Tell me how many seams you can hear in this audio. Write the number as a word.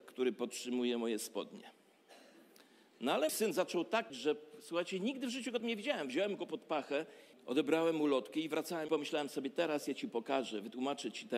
five